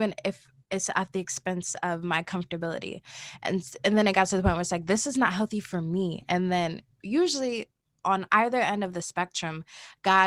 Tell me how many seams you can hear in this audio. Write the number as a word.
zero